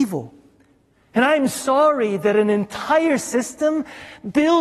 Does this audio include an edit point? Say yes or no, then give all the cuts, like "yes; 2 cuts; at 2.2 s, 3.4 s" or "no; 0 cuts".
no; 0 cuts